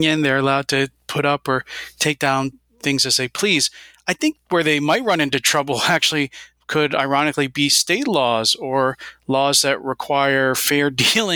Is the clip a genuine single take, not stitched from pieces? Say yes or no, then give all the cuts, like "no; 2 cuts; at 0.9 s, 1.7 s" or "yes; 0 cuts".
yes; 0 cuts